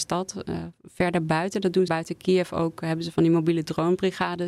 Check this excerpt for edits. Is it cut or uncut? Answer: cut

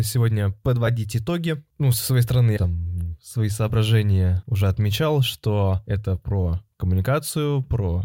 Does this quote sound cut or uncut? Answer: cut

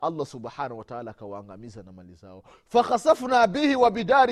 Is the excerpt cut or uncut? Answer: uncut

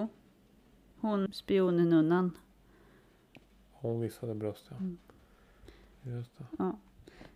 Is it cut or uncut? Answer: cut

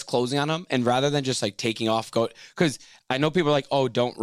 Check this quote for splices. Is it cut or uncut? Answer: uncut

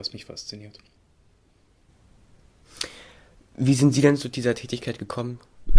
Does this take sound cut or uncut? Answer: uncut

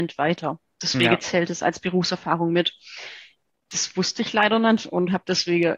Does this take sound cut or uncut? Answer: uncut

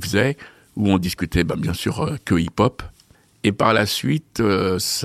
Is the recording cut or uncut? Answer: uncut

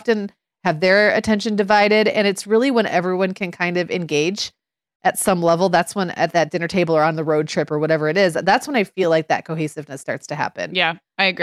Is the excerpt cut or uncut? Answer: uncut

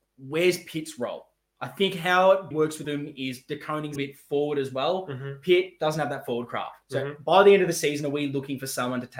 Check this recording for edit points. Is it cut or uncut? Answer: cut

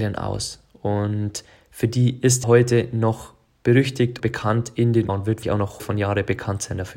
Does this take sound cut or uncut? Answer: cut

